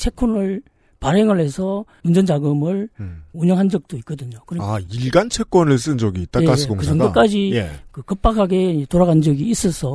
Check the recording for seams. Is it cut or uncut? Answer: uncut